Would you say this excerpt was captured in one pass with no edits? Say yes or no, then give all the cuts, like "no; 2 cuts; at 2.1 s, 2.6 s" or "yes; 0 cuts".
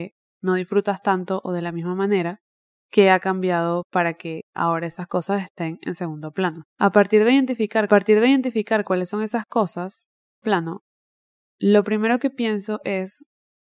no; 4 cuts; at 2.6 s, 6.7 s, 7.9 s, 10.4 s